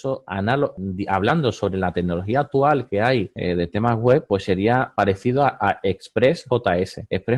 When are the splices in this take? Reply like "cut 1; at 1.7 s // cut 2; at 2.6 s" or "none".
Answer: none

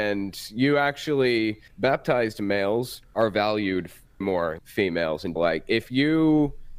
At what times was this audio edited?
cut 1; at 1.7 s // cut 2; at 3.0 s // cut 3; at 4.2 s // cut 4; at 4.6 s // cut 5; at 5.4 s

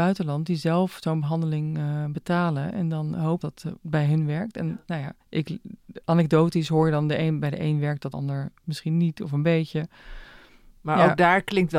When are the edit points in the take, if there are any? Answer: cut 1; at 3.4 s // cut 2; at 5.2 s // cut 3; at 8.1 s

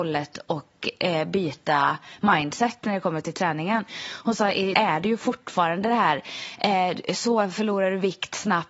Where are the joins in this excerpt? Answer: cut 1; at 4.7 s

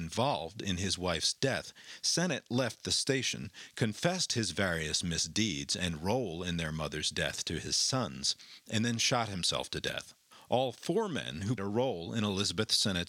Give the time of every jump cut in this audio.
cut 1; at 10.3 s // cut 2; at 11.6 s

